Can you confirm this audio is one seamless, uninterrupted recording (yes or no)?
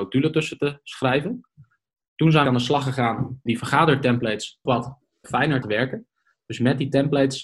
no